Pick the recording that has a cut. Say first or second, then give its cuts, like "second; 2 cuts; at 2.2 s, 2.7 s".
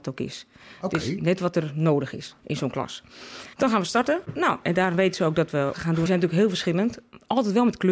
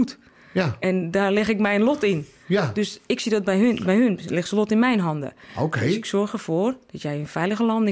first; 5 cuts; at 2.4 s, 3.5 s, 4.2 s, 5.7 s, 6.1 s